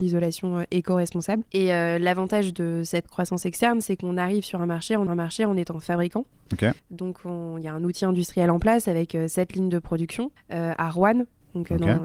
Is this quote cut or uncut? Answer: cut